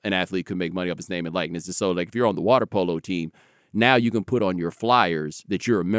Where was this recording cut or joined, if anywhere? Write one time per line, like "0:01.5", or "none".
none